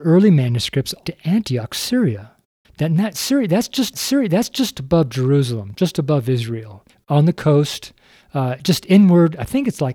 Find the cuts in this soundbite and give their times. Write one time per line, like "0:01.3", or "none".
0:01.0
0:02.6
0:03.9
0:06.9